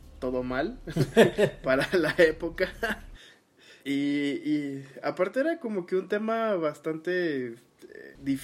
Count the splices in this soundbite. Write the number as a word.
one